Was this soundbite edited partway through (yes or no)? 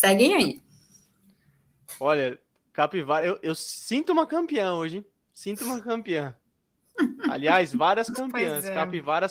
no